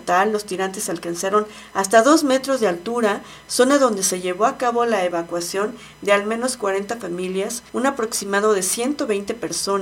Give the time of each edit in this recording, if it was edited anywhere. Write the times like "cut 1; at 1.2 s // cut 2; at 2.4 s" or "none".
cut 1; at 7.7 s